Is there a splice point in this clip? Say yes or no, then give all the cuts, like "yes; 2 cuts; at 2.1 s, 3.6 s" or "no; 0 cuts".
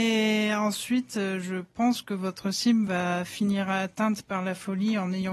no; 0 cuts